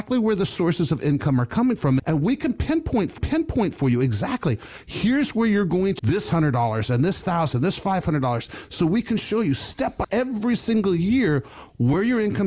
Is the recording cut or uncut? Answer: cut